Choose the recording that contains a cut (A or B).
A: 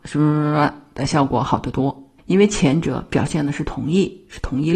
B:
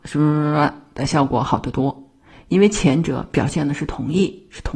A